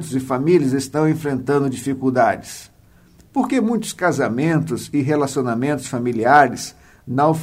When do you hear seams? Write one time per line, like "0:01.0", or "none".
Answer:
none